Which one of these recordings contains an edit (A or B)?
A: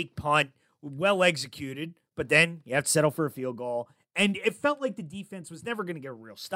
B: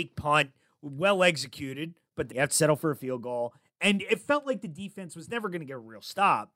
B